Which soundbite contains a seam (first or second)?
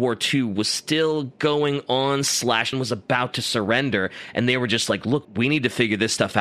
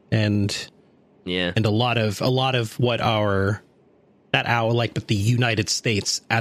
first